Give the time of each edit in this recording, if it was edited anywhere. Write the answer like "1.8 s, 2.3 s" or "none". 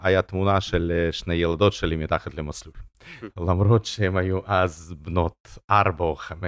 2.9 s